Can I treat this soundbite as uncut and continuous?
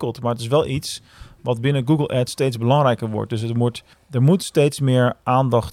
no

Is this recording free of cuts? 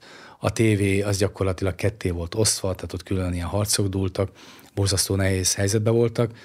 yes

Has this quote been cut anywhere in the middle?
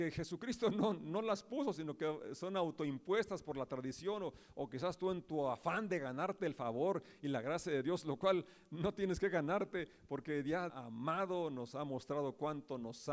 yes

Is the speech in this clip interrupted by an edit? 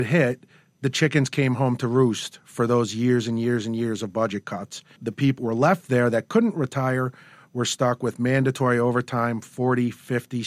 yes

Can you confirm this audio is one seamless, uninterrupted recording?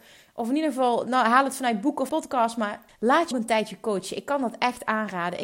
no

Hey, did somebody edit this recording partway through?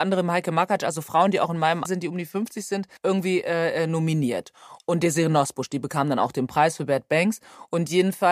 yes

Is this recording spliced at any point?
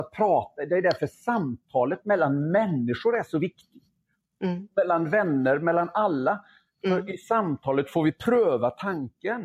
no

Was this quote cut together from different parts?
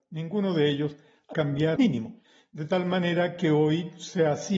yes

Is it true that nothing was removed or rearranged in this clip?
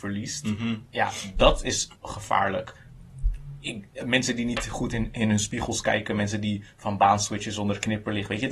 no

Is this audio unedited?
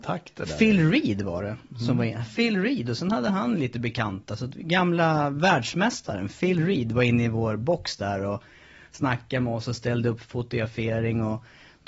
no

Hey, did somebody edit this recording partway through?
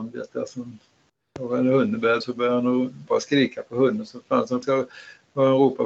yes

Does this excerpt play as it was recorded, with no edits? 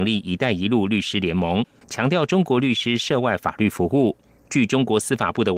yes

